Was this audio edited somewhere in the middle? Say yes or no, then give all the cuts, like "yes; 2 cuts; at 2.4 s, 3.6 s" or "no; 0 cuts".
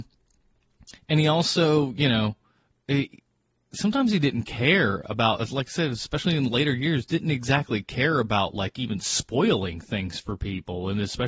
no; 0 cuts